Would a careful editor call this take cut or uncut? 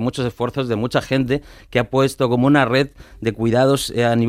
uncut